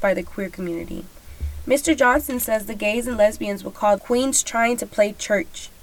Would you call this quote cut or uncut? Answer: cut